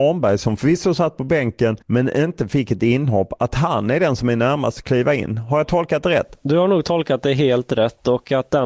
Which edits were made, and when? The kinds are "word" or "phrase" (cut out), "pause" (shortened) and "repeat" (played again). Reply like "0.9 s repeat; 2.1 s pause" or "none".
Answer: 1.8 s pause